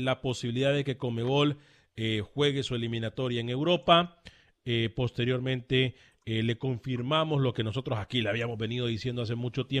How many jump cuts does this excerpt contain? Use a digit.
0